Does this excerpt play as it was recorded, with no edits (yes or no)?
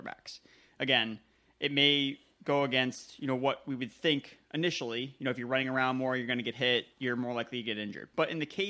yes